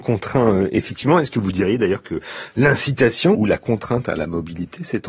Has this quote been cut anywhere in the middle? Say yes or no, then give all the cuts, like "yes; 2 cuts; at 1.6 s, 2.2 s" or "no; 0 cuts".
yes; 1 cut; at 3.3 s